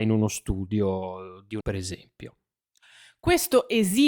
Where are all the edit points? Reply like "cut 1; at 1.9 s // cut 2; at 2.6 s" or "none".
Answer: cut 1; at 1.6 s